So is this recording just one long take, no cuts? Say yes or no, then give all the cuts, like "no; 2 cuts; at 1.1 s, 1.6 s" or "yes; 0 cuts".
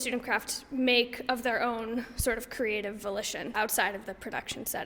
no; 1 cut; at 3.5 s